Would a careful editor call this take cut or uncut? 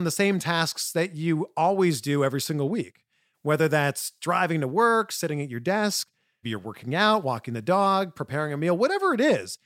cut